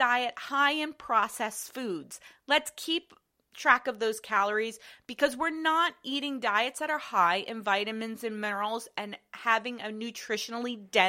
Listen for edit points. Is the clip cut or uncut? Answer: uncut